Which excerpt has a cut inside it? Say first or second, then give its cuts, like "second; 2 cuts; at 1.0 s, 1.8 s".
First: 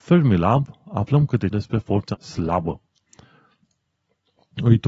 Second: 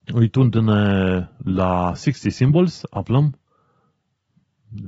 first; 2 cuts; at 1.5 s, 2.1 s